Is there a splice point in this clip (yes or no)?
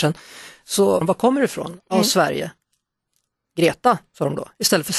yes